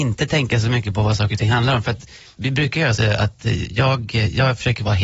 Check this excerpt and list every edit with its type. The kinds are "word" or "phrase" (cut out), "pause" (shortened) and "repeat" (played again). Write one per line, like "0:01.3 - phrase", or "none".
0:02.4 - word
0:03.0 - phrase